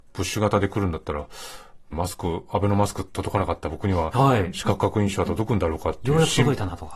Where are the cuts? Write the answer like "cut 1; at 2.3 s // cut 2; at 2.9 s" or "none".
cut 1; at 1.9 s